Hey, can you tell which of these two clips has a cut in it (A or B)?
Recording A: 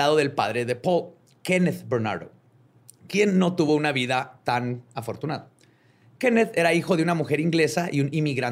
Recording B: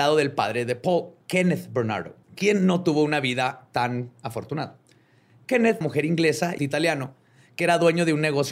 B